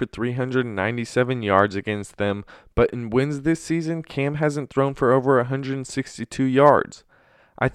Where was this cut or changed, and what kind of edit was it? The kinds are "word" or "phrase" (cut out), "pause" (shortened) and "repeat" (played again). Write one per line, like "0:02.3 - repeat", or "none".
none